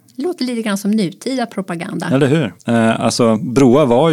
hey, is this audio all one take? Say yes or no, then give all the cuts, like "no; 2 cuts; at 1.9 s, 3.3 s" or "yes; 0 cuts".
no; 1 cut; at 2.6 s